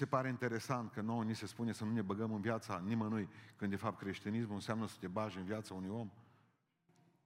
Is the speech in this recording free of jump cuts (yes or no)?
yes